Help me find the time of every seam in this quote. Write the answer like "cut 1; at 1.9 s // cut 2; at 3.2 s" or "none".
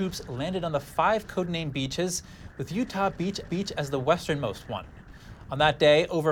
cut 1; at 3.4 s